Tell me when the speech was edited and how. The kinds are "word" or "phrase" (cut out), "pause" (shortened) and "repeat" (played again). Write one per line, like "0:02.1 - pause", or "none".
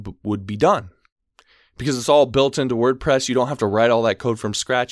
none